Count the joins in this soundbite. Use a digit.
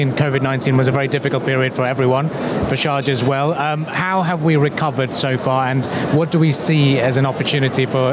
0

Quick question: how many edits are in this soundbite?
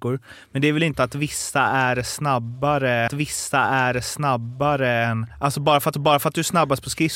3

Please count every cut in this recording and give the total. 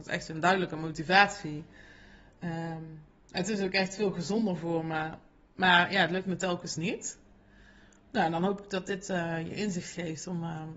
0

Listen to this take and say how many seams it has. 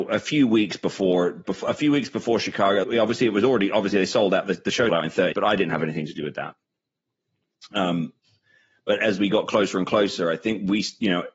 4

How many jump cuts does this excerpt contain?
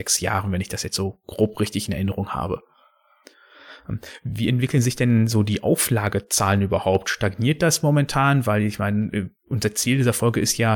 0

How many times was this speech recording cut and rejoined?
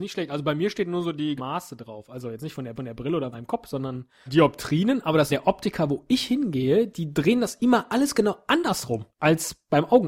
6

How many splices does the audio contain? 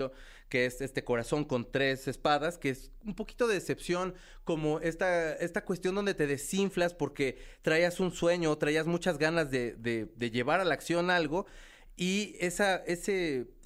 0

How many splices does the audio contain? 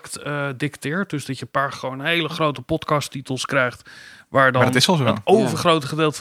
0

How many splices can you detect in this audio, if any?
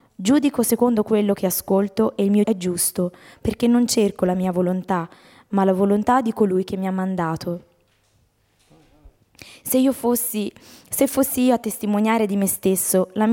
1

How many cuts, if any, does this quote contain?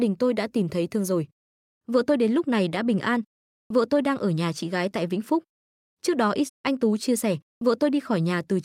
1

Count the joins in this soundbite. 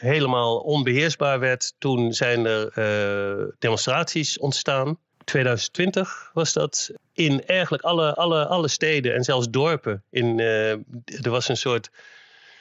1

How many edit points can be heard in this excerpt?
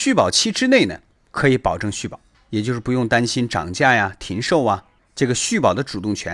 0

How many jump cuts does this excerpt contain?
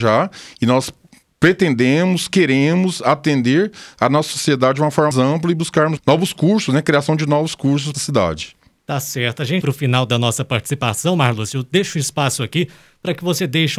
4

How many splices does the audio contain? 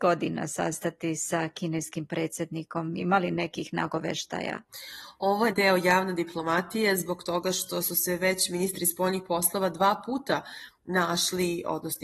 1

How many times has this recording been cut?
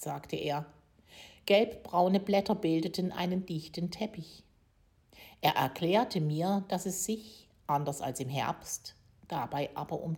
0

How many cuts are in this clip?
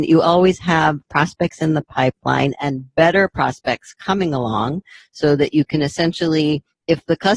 0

